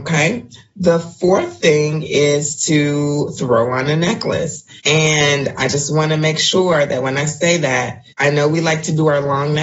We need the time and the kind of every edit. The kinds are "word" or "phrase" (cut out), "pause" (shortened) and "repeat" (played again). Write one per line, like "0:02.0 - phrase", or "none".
0:04.8 - pause
0:08.1 - pause

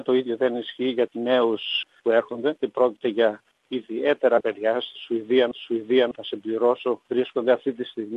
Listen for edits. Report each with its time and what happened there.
0:01.1 - word
0:02.0 - word
0:02.6 - word
0:04.4 - word
0:05.5 - repeat
0:07.0 - pause

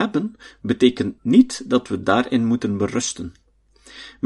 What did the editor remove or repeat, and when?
none

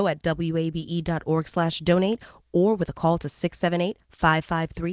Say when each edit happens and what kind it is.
none

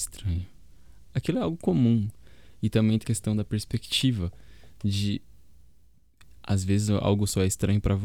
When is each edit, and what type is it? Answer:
0:03.0 - word

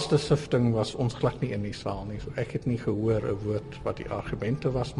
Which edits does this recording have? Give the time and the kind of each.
none

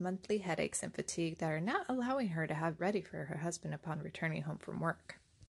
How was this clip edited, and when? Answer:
0:02.8 - word

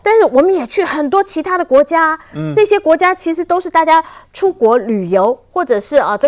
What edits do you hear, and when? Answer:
none

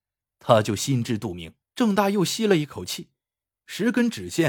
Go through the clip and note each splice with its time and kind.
0:01.6 - pause

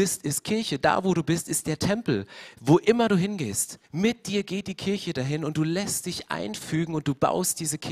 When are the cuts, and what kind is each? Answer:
0:03.8 - pause

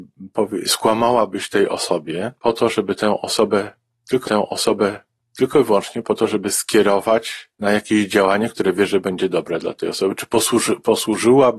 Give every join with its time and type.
0:02.4 - pause
0:04.2 - repeat
0:07.5 - pause

